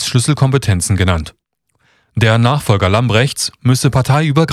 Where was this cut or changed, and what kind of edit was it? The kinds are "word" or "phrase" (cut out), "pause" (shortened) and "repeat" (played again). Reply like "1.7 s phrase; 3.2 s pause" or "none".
none